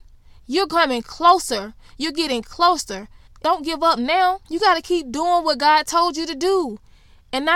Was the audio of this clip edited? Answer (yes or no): yes